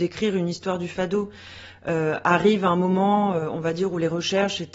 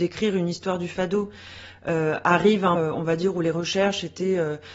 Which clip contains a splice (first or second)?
second